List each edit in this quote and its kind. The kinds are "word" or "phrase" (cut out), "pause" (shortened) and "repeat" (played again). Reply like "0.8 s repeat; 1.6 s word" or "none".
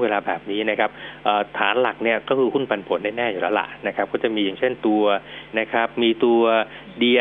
5.5 s word